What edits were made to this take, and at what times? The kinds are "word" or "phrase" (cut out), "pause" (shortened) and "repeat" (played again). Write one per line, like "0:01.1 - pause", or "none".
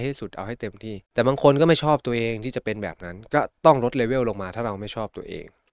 0:01.0 - pause